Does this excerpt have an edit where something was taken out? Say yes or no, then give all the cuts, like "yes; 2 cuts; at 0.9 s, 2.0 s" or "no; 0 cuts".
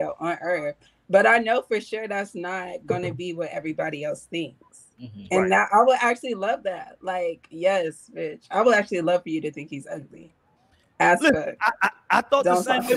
no; 0 cuts